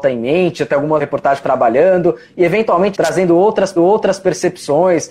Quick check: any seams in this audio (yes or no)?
yes